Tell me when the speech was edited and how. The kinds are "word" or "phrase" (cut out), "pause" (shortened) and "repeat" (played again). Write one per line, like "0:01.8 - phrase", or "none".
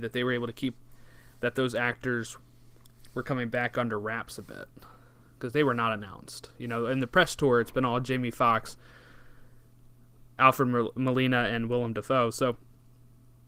none

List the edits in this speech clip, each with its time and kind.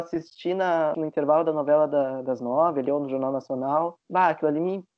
0:00.9 - phrase
0:04.0 - pause

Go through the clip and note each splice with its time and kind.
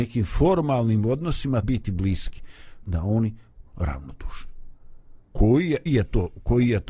0:01.6 - word
0:02.8 - phrase
0:03.6 - word
0:05.2 - pause
0:05.9 - word

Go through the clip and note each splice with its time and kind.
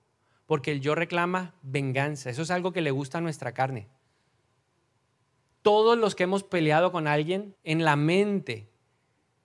0:07.6 - pause

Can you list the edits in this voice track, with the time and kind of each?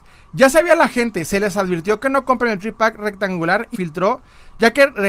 0:03.7 - word

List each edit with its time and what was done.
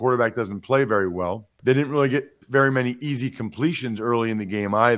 0:01.5 - pause
0:02.4 - phrase

